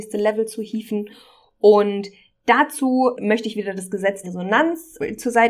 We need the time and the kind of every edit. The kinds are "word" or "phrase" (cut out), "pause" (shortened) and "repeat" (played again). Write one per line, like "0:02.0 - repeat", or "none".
0:04.2 - word